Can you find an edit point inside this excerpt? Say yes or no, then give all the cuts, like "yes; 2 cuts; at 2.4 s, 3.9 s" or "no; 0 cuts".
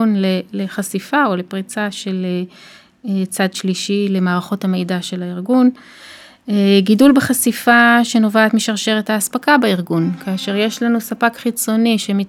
no; 0 cuts